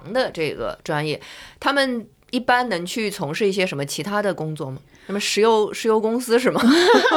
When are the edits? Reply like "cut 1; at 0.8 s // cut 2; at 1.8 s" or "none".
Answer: none

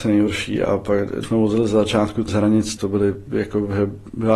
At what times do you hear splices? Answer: cut 1; at 1.2 s // cut 2; at 2.3 s // cut 3; at 2.8 s // cut 4; at 3.3 s

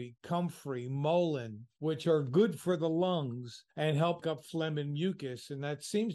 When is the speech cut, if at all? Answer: cut 1; at 3.7 s // cut 2; at 4.2 s

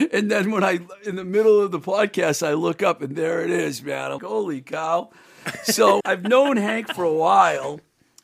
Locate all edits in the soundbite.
cut 1; at 4.2 s // cut 2; at 6.0 s

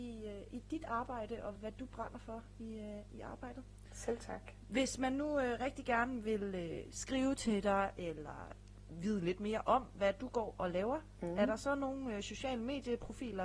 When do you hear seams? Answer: cut 1; at 1.5 s

